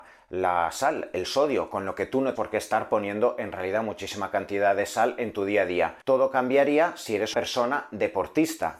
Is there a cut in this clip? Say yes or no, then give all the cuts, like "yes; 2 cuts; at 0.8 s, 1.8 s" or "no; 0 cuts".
yes; 3 cuts; at 2.4 s, 6.0 s, 7.3 s